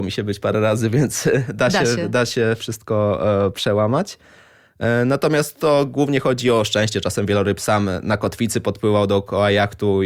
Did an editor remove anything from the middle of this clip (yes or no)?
no